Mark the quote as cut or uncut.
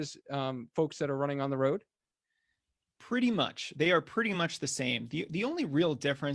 uncut